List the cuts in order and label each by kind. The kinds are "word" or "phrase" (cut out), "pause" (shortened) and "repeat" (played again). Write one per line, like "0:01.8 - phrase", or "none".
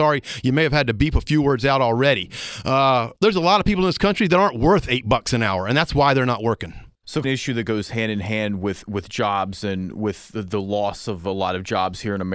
0:03.2 - pause
0:07.2 - phrase